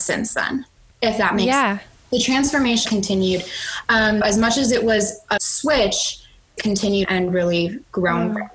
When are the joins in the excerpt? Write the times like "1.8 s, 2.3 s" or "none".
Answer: 2.8 s, 4.2 s, 5.4 s, 6.6 s, 7.0 s